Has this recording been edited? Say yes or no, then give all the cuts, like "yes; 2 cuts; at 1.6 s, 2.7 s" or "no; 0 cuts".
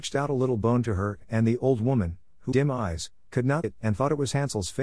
yes; 2 cuts; at 2.5 s, 3.6 s